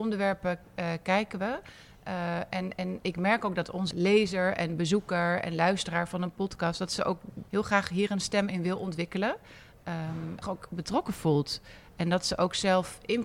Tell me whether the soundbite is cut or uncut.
cut